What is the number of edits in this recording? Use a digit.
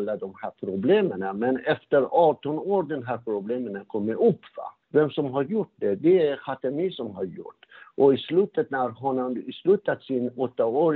1